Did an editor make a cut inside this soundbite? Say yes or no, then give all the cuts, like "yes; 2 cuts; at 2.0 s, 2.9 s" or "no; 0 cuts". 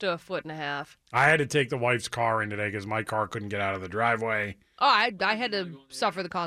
yes; 1 cut; at 1.0 s